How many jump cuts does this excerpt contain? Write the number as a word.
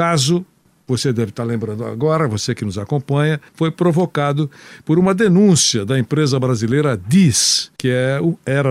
two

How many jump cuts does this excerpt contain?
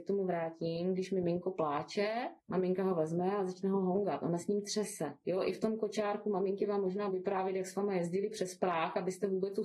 two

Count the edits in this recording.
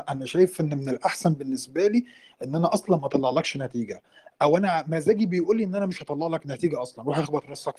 zero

